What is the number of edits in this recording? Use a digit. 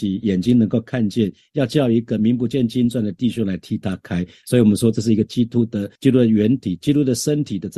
1